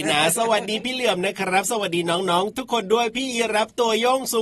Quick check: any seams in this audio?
yes; 1 cut; at 2.5 s

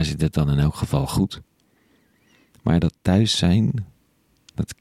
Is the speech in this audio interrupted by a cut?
no; 0 cuts

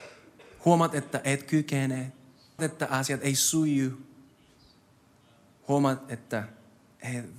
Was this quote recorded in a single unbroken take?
no; 1 cut; at 2.6 s

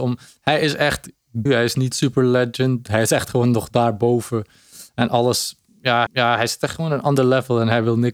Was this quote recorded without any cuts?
no; 3 cuts; at 1.5 s, 1.9 s, 6.1 s

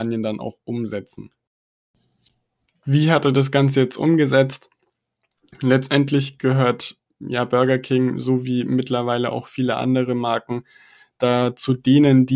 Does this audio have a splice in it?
no; 0 cuts

